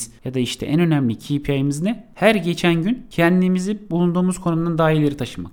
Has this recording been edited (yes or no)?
no